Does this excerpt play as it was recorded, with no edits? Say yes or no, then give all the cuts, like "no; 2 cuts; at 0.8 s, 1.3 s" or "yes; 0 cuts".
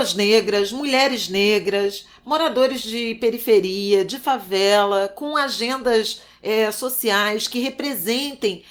yes; 0 cuts